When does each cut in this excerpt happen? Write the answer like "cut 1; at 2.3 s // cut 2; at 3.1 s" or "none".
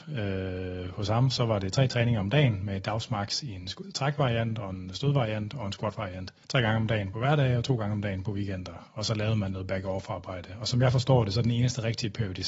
cut 1; at 3.8 s // cut 2; at 6.4 s